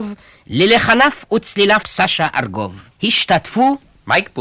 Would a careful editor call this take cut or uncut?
cut